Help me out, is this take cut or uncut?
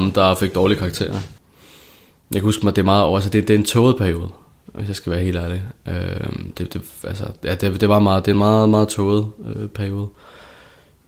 uncut